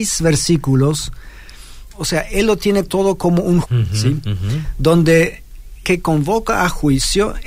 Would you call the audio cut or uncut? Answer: cut